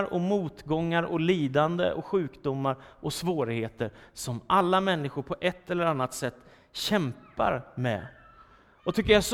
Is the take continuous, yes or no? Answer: yes